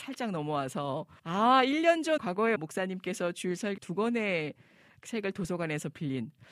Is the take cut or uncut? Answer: cut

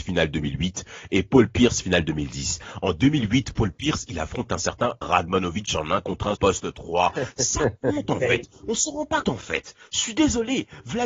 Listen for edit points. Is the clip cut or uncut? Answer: cut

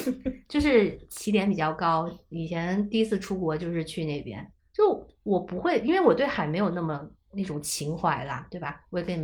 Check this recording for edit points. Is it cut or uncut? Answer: cut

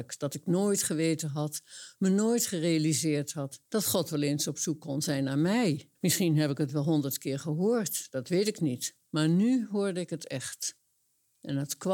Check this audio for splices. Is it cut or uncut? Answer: cut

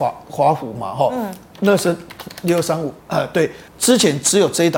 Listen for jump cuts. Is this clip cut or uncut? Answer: cut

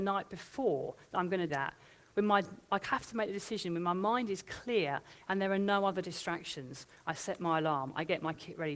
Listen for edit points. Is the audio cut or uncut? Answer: cut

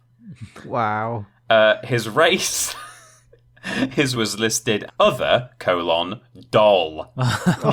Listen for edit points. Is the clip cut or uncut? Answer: cut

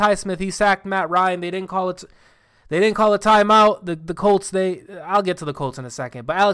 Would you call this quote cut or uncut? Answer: uncut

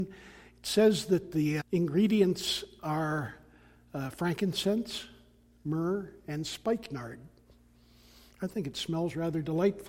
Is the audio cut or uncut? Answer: cut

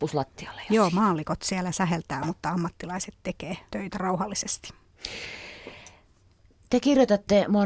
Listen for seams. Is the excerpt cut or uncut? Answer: cut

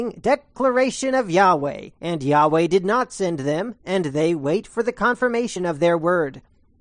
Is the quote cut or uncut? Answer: cut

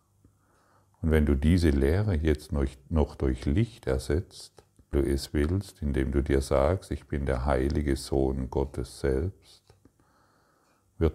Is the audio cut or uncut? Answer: cut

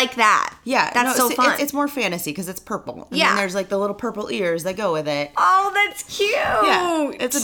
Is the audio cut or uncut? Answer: cut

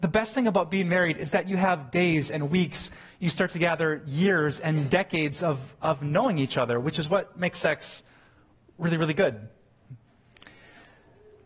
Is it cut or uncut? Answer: uncut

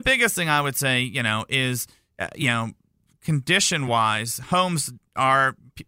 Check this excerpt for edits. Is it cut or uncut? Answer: uncut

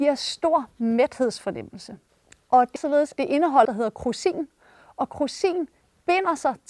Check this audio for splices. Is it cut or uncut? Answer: cut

